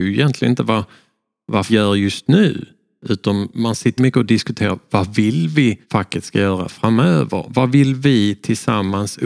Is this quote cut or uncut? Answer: cut